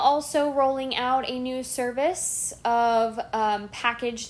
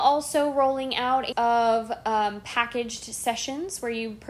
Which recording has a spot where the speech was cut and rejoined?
second; 1 cut; at 1.3 s

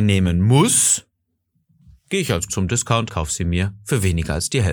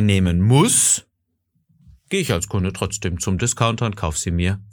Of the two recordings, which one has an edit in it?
first; 2 cuts; at 2.5 s, 3.1 s

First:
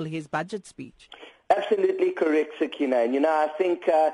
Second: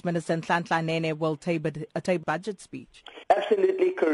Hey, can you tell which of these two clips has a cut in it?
second; 2 cuts; at 2.2 s, 3.2 s

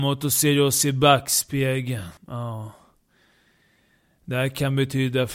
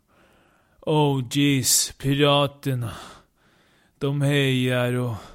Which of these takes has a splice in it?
first; 1 cut; at 2.2 s

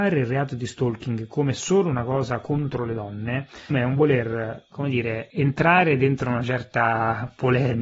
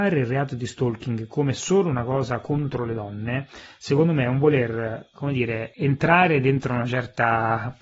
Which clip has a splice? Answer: first; 1 cut; at 3.7 s

